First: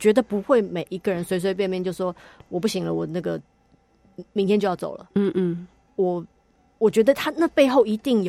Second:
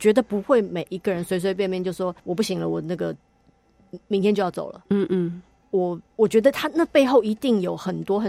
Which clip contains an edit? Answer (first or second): second